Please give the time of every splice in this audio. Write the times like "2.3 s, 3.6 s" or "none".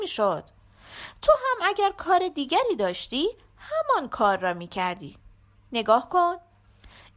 none